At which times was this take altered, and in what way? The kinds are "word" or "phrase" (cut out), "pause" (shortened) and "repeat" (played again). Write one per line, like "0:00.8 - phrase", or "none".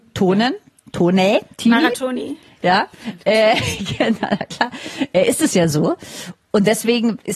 none